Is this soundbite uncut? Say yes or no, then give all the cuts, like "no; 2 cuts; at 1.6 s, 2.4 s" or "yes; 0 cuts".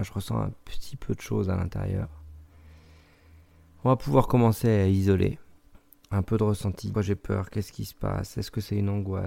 no; 2 cuts; at 5.6 s, 6.9 s